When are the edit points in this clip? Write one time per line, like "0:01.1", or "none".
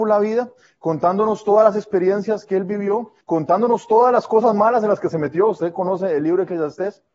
0:03.2